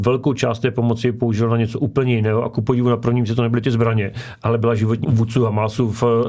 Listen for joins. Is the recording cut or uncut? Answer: cut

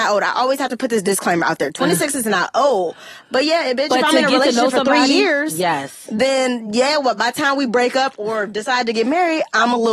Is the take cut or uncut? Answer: uncut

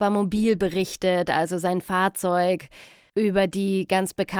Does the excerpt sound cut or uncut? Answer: uncut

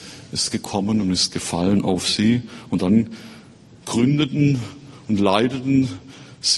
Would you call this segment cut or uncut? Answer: uncut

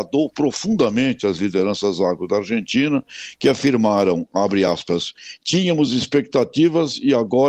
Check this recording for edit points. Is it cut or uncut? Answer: uncut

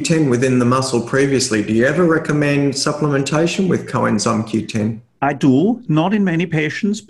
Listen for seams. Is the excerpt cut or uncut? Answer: uncut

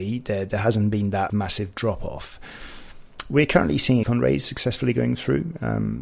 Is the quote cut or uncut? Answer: cut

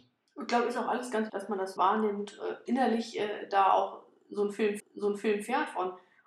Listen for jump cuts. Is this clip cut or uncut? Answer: cut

